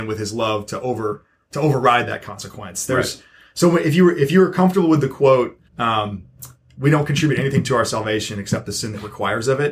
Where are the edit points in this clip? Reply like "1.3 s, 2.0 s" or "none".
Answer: 5.7 s